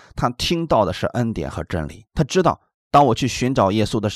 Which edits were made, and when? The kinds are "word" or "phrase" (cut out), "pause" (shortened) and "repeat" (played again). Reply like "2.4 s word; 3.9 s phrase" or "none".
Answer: none